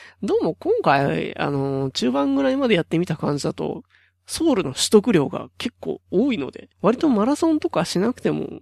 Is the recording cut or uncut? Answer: cut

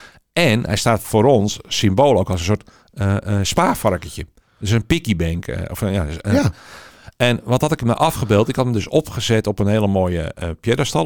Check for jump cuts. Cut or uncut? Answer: uncut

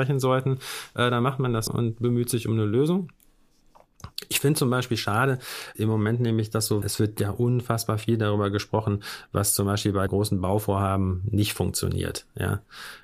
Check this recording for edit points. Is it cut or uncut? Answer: cut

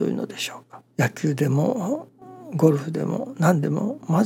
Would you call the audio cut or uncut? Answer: cut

